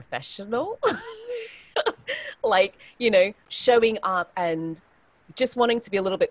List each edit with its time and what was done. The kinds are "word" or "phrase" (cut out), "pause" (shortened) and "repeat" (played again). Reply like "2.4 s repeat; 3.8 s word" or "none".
none